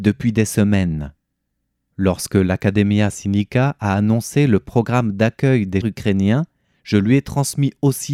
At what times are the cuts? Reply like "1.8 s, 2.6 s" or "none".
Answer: 1.5 s, 5.8 s